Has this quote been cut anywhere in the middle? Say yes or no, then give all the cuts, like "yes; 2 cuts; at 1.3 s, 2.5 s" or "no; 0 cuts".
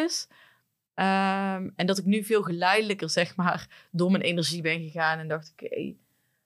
no; 0 cuts